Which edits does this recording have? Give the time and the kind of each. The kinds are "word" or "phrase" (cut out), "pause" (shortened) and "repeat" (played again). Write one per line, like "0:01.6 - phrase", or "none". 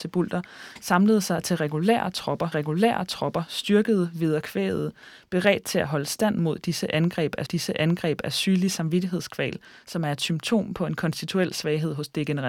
0:02.5 - repeat
0:07.5 - repeat